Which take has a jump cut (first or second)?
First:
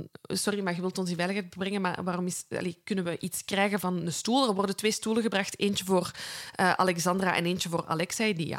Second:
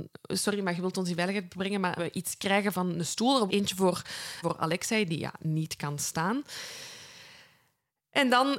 second